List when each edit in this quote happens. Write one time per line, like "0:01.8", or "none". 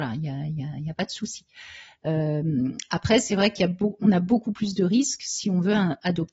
none